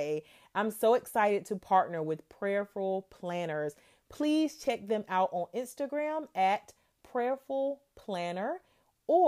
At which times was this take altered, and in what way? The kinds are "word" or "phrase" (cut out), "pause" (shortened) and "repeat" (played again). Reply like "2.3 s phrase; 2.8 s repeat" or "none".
none